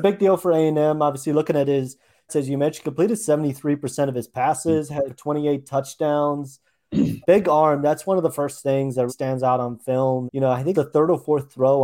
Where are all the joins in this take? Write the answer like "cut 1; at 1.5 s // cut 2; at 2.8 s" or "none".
cut 1; at 2.3 s // cut 2; at 5.1 s // cut 3; at 7.2 s // cut 4; at 9.1 s // cut 5; at 10.3 s // cut 6; at 10.7 s